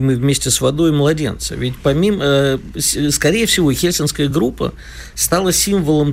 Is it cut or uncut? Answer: uncut